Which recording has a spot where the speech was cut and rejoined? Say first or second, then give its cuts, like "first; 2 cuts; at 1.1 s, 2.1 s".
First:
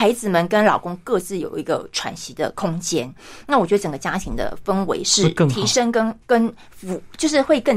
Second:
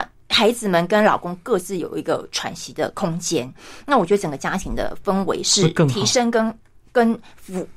first; 1 cut; at 6.2 s